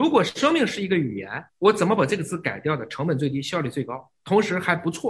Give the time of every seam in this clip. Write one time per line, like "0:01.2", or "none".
0:01.5
0:04.1

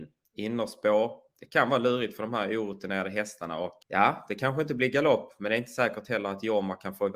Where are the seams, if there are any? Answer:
0:03.8

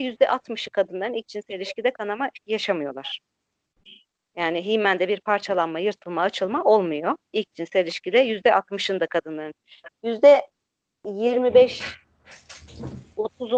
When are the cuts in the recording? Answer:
none

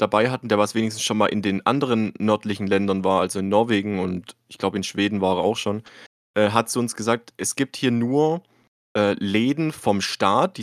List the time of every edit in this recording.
none

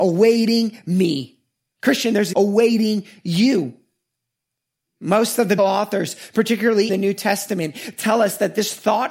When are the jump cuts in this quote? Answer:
0:02.3
0:05.6
0:06.9

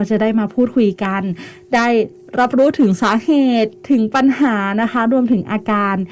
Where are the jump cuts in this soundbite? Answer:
none

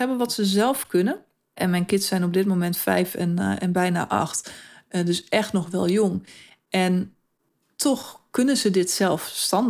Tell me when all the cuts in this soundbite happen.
none

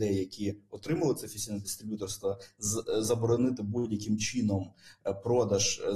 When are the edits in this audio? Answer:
none

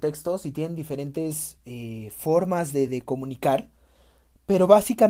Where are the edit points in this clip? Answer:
none

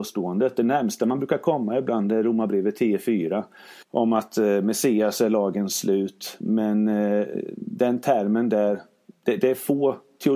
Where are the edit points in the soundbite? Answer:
0:03.8

